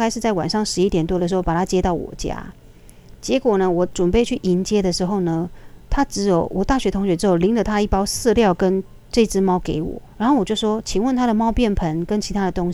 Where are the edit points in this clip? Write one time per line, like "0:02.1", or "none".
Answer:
0:10.1

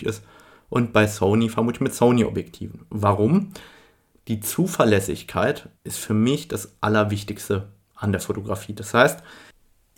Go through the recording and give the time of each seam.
0:05.8

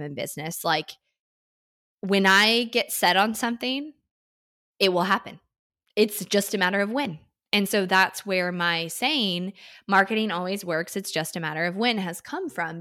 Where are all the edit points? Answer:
none

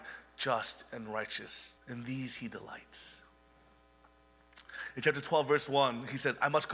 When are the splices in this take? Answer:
0:01.8

